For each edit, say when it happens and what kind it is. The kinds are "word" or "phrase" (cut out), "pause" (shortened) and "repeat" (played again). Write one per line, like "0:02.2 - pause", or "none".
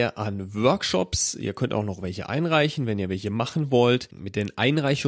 none